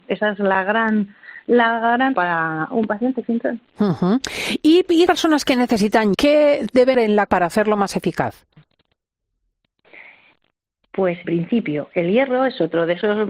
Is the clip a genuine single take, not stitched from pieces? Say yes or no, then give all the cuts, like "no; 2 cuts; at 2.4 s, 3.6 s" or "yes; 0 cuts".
no; 8 cuts; at 2.1 s, 3.2 s, 3.7 s, 5.1 s, 6.1 s, 6.9 s, 7.3 s, 11.2 s